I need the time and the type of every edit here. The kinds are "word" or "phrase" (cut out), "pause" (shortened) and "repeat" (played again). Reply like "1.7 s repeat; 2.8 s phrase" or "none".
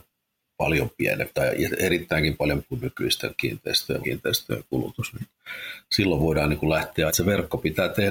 2.6 s word; 4.0 s word; 7.1 s word